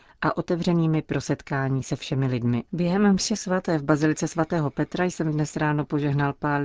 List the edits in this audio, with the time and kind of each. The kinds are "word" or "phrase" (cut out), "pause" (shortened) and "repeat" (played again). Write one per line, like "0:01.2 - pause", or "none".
0:02.7 - pause